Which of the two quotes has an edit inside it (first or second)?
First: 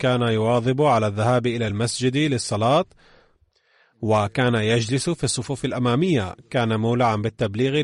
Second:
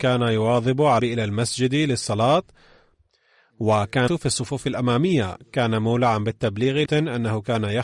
second